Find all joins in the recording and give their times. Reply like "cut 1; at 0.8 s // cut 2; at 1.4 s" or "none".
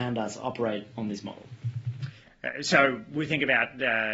none